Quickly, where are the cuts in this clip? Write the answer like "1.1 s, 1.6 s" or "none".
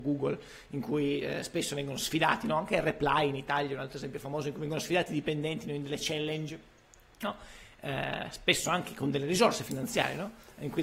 none